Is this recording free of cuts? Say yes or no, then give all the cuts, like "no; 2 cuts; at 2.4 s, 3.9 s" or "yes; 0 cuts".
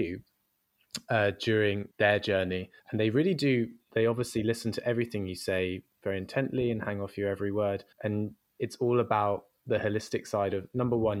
no; 3 cuts; at 1.9 s, 2.8 s, 7.9 s